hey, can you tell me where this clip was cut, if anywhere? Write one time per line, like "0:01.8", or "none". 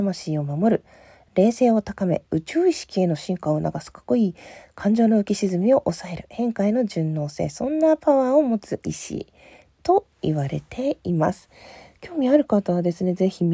none